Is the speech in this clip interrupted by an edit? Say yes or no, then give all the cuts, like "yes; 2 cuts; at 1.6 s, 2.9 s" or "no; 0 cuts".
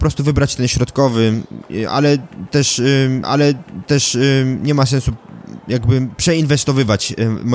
yes; 1 cut; at 3.2 s